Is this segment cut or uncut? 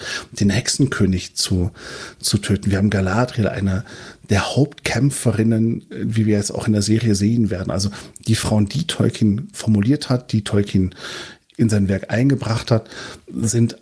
cut